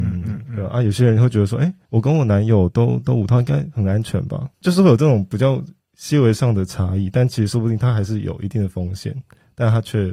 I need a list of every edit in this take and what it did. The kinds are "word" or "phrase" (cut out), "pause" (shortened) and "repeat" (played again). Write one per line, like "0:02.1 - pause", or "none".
none